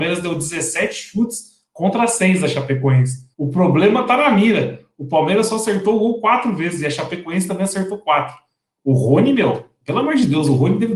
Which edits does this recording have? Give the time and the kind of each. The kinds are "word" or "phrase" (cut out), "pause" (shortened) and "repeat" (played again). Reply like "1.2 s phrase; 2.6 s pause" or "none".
3.3 s pause